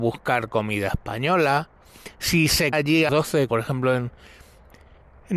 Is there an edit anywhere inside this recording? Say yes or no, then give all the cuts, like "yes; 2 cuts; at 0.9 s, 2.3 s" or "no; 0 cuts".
yes; 3 cuts; at 2.7 s, 3.1 s, 3.5 s